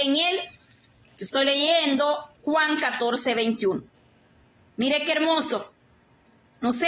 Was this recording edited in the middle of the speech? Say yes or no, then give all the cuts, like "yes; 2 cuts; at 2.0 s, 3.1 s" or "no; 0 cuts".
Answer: no; 0 cuts